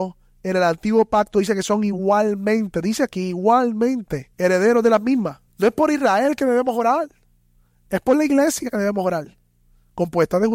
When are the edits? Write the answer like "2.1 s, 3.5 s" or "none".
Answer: 4.3 s, 5.5 s